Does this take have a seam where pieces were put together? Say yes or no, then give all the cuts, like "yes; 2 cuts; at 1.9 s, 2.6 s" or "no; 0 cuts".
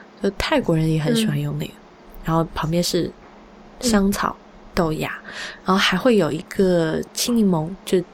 no; 0 cuts